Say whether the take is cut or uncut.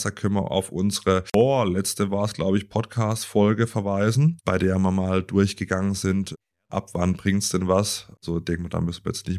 uncut